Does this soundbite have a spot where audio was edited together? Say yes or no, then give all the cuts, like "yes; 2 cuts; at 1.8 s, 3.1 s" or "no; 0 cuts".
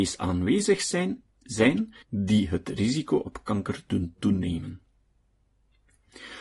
yes; 1 cut; at 2.0 s